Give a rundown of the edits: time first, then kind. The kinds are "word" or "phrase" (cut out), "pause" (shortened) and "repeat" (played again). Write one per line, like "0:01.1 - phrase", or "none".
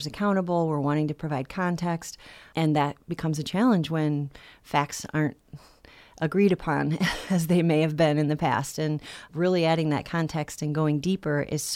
none